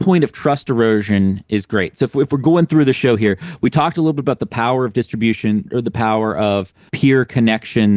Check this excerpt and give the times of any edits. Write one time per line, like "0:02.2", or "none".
none